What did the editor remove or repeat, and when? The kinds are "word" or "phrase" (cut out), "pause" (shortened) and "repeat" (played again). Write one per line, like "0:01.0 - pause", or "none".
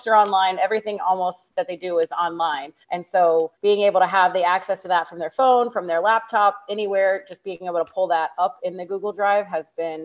0:02.8 - pause
0:03.5 - pause